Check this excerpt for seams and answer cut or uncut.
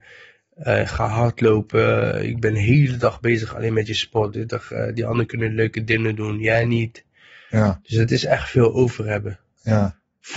uncut